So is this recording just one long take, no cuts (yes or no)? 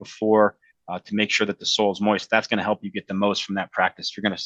yes